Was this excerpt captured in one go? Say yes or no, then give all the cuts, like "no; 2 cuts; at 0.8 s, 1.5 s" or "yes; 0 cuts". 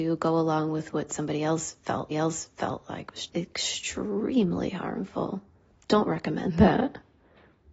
no; 2 cuts; at 2.1 s, 3.3 s